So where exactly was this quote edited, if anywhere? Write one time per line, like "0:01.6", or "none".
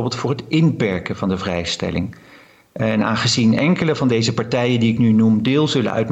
none